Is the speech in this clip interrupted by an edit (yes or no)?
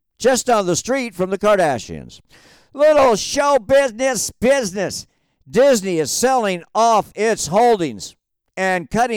no